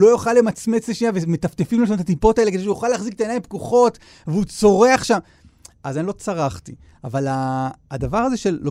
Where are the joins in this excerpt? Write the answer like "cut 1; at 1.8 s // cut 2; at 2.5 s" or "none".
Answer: none